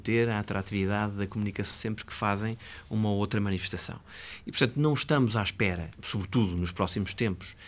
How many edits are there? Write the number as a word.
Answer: two